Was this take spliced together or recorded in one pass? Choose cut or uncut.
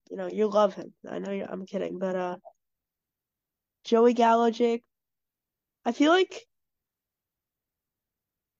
uncut